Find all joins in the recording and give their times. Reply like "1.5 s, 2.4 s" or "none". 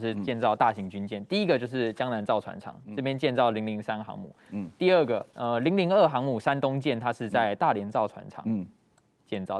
5.3 s